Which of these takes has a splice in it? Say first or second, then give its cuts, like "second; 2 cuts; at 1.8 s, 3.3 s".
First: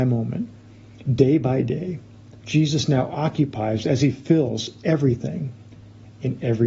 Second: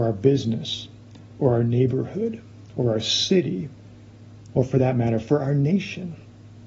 first; 1 cut; at 2.4 s